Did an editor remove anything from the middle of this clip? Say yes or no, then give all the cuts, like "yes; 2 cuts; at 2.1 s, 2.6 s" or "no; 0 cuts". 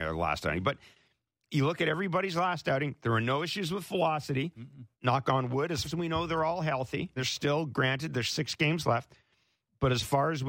yes; 3 cuts; at 5.8 s, 7.2 s, 8.3 s